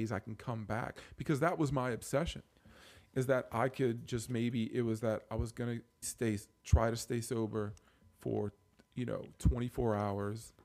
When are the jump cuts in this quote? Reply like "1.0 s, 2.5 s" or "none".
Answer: 6.0 s